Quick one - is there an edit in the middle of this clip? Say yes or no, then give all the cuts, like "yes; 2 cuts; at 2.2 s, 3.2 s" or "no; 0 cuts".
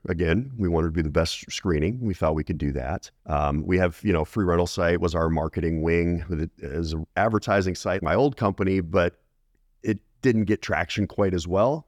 yes; 2 cuts; at 3.2 s, 8.0 s